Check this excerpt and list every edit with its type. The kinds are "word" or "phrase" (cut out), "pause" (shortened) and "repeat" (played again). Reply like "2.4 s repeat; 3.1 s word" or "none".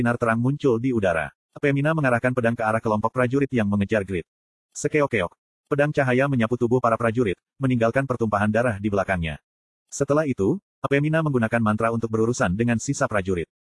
none